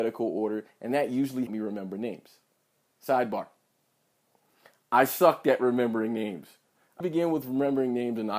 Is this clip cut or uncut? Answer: cut